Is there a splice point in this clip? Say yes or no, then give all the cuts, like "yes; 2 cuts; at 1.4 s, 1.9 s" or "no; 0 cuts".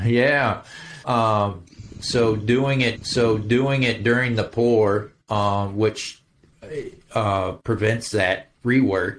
yes; 4 cuts; at 1.0 s, 3.0 s, 5.2 s, 7.6 s